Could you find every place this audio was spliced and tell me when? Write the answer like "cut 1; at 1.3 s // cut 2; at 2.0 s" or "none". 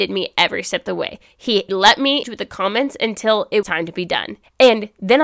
cut 1; at 1.7 s // cut 2; at 2.2 s // cut 3; at 3.6 s

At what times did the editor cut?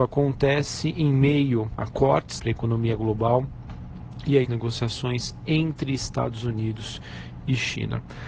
cut 1; at 1.8 s // cut 2; at 2.4 s // cut 3; at 4.4 s

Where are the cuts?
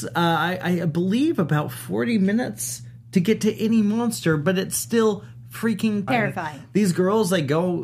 cut 1; at 6.1 s

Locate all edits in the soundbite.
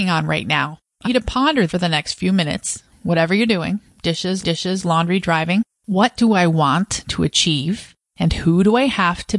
cut 1; at 1.0 s // cut 2; at 1.7 s // cut 3; at 4.4 s

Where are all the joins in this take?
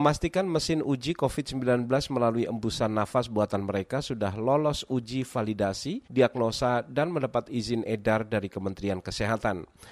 cut 1; at 6.0 s

